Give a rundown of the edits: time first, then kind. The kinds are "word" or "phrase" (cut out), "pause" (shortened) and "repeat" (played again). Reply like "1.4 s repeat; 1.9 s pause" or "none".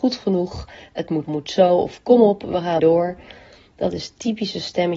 1.2 s phrase; 2.8 s word